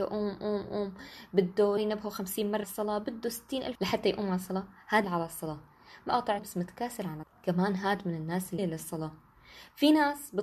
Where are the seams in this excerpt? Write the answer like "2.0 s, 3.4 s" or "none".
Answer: 1.8 s, 2.6 s, 3.8 s, 5.0 s, 6.1 s, 6.4 s, 7.2 s, 8.6 s